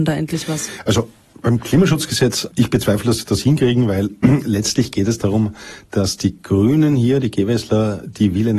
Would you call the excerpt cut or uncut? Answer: uncut